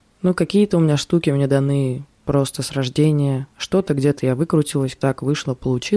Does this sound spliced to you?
yes; 3 cuts; at 2.1 s, 3.5 s, 5.0 s

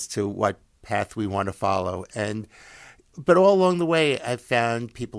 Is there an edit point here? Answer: yes; 1 cut; at 3.1 s

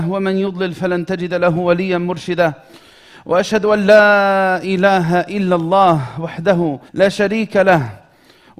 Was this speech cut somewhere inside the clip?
yes; 1 cut; at 6.9 s

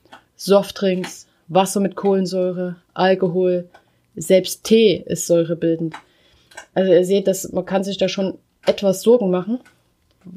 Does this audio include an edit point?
no; 0 cuts

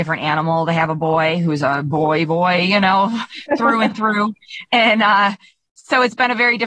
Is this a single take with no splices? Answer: yes; 0 cuts

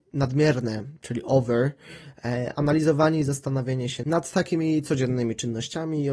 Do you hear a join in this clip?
no; 0 cuts

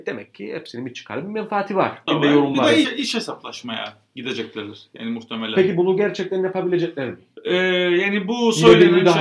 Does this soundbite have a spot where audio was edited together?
yes; 2 cuts; at 2.1 s, 2.8 s

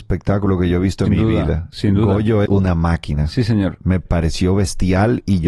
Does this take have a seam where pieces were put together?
yes; 3 cuts; at 1.1 s, 2.5 s, 4.1 s

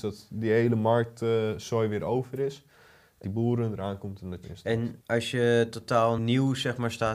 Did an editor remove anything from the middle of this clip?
yes; 4 cuts; at 3.2 s, 4.4 s, 5.0 s, 6.2 s

